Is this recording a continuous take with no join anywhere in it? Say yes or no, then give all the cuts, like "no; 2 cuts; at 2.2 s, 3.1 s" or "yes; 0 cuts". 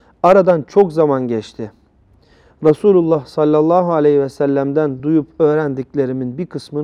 yes; 0 cuts